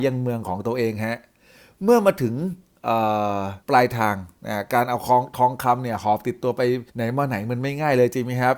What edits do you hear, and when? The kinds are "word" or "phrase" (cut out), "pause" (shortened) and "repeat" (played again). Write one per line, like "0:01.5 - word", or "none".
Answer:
0:03.6 - pause
0:06.9 - pause